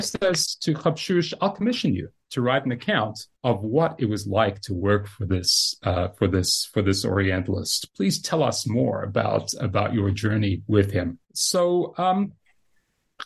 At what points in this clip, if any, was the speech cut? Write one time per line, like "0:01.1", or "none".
0:03.4
0:11.2